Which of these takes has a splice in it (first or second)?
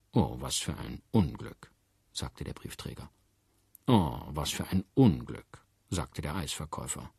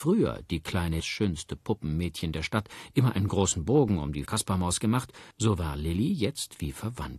second